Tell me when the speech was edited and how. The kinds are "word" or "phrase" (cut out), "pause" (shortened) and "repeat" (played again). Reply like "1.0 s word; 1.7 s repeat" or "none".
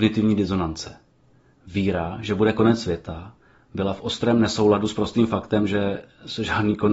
none